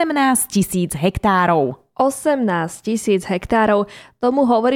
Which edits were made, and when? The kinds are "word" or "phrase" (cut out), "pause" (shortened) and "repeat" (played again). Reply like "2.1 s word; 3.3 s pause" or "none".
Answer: none